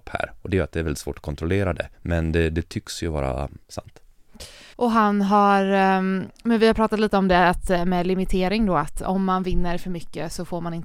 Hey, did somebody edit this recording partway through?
yes; 2 cuts; at 1.9 s, 4.7 s

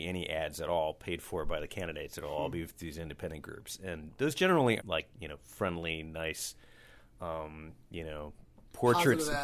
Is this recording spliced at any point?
yes; 1 cut; at 4.8 s

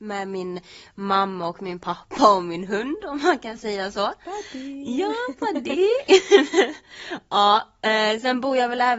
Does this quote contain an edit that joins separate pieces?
no; 0 cuts

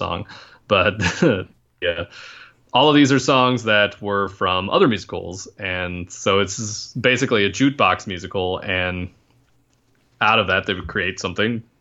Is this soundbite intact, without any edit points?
yes; 0 cuts

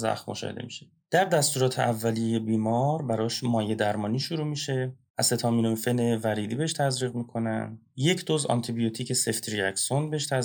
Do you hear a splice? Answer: no; 0 cuts

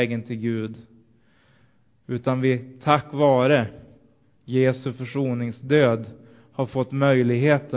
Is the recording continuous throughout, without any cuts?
yes; 0 cuts

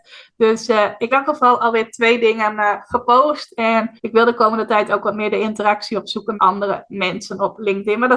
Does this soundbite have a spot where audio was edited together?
yes; 3 cuts; at 1.1 s, 4.0 s, 6.4 s

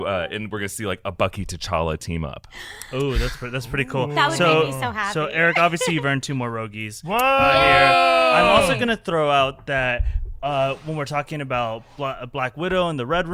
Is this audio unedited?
yes; 0 cuts

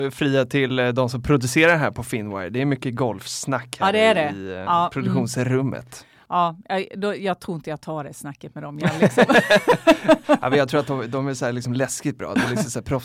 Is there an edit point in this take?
no; 0 cuts

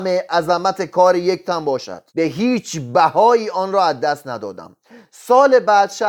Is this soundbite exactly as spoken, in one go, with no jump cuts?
no; 1 cut; at 2.1 s

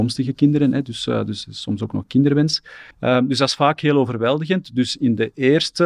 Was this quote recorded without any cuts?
no; 1 cut; at 2.9 s

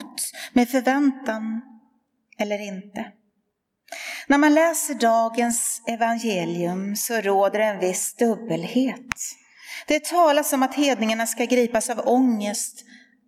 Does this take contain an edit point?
no; 0 cuts

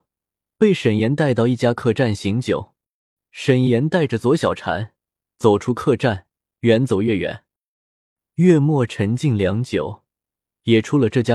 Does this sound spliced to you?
no; 0 cuts

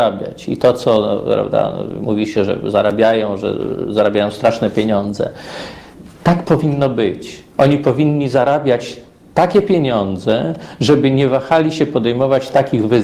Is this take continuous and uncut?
yes; 0 cuts

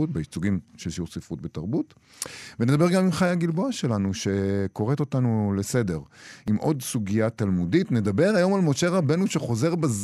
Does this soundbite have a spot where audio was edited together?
no; 0 cuts

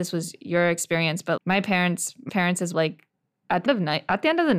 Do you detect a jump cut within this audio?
yes; 4 cuts; at 1.4 s, 2.3 s, 2.7 s, 3.7 s

